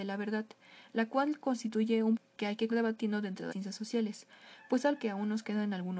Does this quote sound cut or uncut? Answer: cut